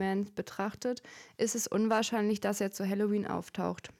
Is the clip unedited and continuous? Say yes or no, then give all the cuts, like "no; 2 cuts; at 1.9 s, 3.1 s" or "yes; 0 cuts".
yes; 0 cuts